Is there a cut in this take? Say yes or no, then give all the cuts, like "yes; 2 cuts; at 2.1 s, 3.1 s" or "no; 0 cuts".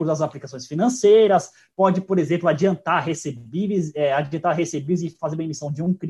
no; 0 cuts